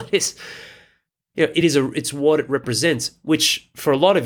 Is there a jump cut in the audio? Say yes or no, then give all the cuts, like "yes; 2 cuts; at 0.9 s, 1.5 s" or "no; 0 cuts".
no; 0 cuts